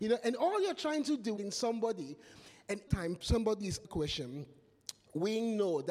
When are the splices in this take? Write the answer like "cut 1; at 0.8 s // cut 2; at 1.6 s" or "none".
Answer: cut 1; at 1.4 s // cut 2; at 2.9 s // cut 3; at 3.8 s